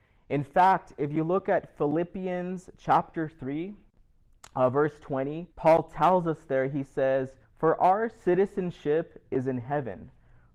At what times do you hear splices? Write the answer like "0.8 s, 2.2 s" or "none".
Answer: 5.5 s, 7.4 s